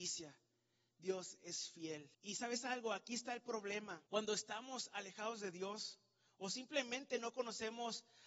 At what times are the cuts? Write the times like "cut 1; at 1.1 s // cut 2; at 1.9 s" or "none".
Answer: cut 1; at 2.1 s // cut 2; at 4.1 s